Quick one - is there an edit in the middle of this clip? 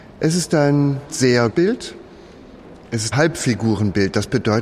yes; 3 cuts; at 1.1 s, 1.5 s, 3.1 s

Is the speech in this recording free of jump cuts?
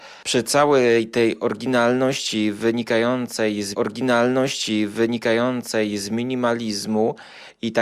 no; 1 cut; at 3.7 s

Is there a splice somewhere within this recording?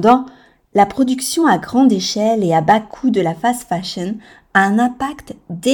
no; 0 cuts

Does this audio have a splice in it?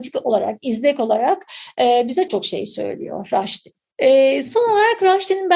yes; 1 cut; at 2.3 s

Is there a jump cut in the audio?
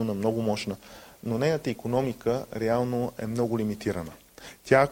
no; 0 cuts

